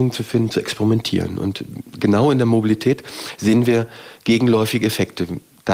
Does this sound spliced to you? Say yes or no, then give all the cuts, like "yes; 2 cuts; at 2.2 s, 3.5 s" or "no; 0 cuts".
no; 0 cuts